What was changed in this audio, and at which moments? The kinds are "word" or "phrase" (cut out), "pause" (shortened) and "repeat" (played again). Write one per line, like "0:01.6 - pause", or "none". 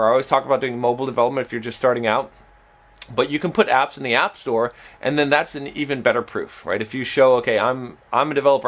none